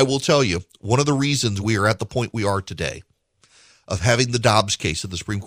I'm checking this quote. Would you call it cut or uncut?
uncut